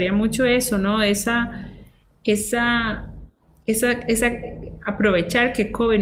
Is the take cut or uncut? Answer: uncut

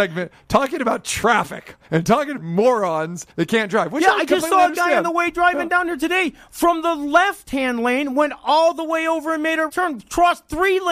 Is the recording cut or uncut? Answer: cut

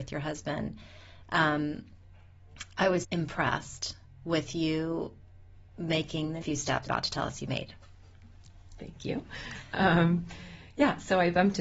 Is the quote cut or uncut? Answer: cut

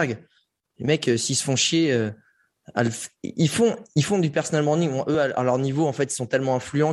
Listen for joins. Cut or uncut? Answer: uncut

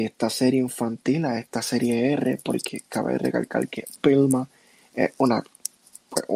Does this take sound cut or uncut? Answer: uncut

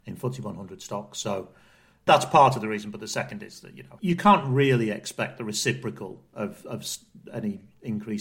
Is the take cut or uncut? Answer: uncut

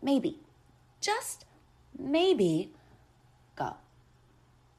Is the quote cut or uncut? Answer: cut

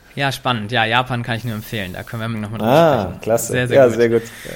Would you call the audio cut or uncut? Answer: cut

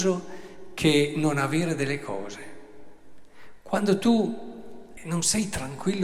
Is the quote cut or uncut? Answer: cut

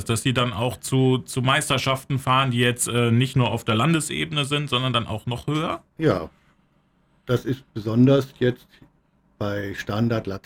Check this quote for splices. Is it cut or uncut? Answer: uncut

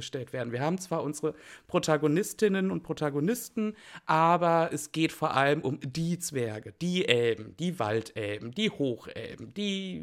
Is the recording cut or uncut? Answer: uncut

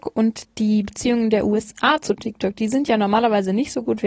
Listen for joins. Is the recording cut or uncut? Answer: uncut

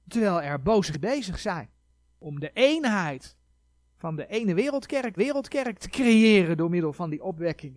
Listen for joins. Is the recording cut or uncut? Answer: cut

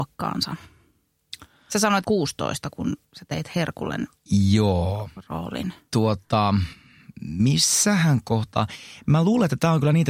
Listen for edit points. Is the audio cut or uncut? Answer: cut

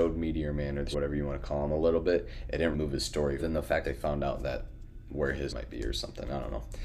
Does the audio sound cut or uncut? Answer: cut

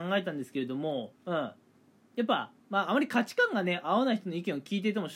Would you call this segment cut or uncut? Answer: cut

